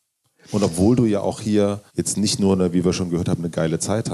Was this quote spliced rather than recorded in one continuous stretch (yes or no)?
yes